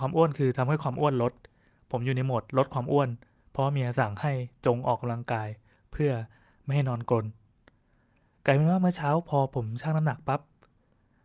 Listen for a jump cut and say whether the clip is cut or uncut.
uncut